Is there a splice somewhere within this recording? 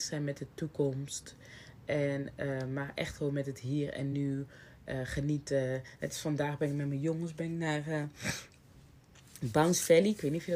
no; 0 cuts

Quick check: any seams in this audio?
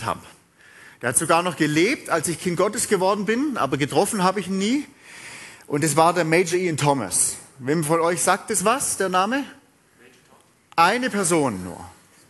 no; 0 cuts

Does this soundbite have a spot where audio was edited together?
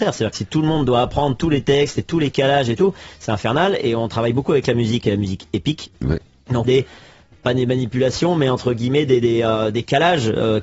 yes; 1 cut; at 6.6 s

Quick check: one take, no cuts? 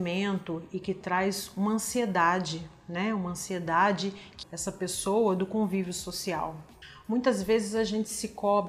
no; 1 cut; at 4.4 s

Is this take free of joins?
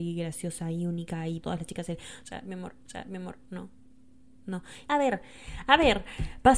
no; 3 cuts; at 1.4 s, 2.9 s, 4.9 s

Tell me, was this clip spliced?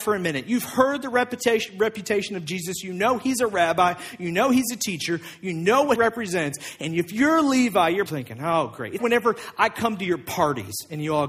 yes; 3 cuts; at 6.0 s, 8.1 s, 9.0 s

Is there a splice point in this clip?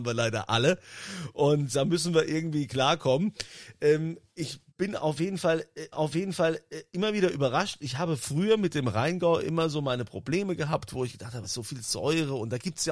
yes; 4 cuts; at 1.7 s, 4.7 s, 5.9 s, 11.4 s

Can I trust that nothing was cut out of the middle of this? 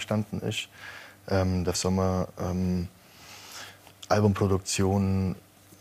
no; 1 cut; at 1.7 s

